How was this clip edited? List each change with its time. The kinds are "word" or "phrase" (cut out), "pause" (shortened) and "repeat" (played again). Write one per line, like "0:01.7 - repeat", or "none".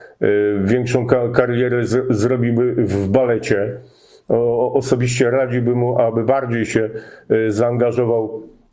none